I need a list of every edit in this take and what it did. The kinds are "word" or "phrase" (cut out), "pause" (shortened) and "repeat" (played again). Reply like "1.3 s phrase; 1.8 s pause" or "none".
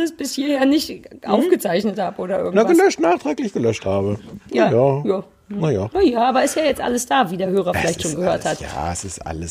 none